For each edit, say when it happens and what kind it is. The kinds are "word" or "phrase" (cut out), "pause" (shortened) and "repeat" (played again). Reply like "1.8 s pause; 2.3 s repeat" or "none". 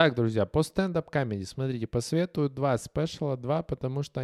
none